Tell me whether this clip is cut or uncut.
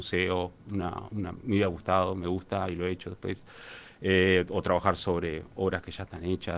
uncut